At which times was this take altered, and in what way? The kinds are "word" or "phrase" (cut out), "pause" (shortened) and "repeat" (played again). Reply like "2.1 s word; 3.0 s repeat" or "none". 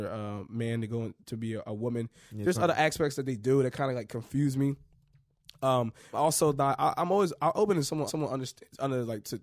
6.1 s phrase; 8.1 s repeat